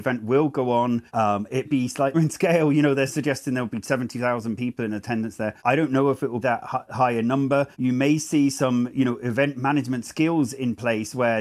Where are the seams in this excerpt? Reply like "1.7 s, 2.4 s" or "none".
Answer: 1.1 s, 1.6 s, 2.1 s, 3.1 s, 5.6 s, 6.4 s, 7.7 s